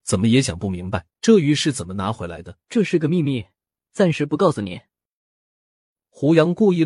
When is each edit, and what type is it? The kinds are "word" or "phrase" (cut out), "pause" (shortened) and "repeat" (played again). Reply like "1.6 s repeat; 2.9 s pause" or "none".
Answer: 1.1 s pause; 2.6 s pause